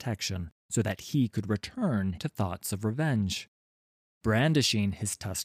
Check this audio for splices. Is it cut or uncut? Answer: uncut